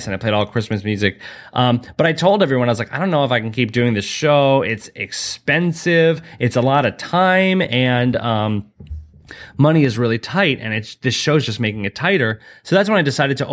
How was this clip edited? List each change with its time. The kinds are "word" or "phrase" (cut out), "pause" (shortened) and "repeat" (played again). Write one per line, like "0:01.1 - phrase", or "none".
none